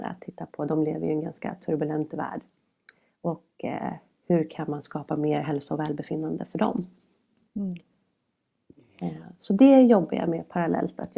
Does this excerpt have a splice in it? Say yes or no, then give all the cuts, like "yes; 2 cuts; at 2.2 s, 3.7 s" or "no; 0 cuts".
no; 0 cuts